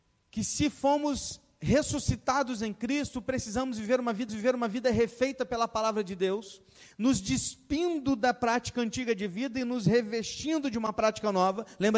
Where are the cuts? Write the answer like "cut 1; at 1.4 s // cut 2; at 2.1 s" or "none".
cut 1; at 4.3 s